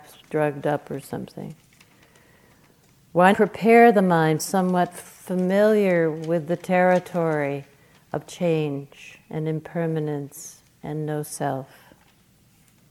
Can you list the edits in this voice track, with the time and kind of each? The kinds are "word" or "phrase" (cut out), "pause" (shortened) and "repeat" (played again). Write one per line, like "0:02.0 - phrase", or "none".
0:03.3 - word
0:04.4 - word